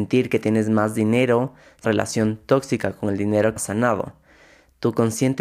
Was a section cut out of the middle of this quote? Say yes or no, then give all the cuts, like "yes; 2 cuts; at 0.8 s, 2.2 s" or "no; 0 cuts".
yes; 2 cuts; at 1.8 s, 3.6 s